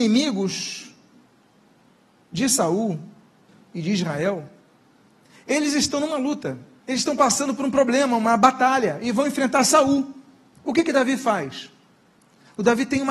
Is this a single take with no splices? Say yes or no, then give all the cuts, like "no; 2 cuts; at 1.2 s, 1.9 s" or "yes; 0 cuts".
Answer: yes; 0 cuts